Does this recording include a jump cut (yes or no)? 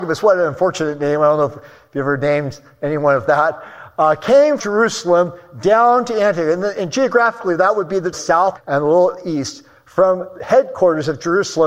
yes